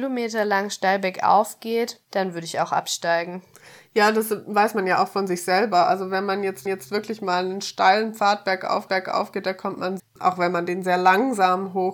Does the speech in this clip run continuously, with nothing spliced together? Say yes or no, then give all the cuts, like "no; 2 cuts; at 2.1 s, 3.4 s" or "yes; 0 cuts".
no; 4 cuts; at 2.0 s, 6.7 s, 8.9 s, 10.0 s